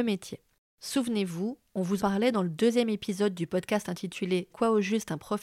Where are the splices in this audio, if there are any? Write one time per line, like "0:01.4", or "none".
0:02.0
0:04.5